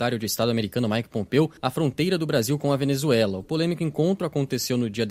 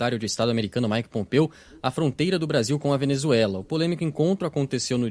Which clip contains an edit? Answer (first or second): first